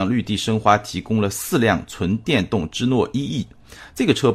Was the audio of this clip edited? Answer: no; 0 cuts

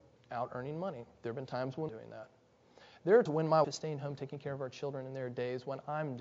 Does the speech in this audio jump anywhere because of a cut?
yes; 3 cuts; at 1.9 s, 3.3 s, 3.6 s

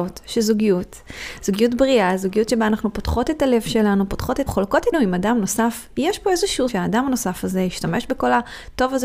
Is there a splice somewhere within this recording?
yes; 3 cuts; at 4.5 s, 4.9 s, 6.7 s

